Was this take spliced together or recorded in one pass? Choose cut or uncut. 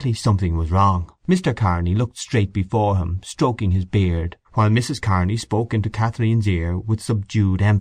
cut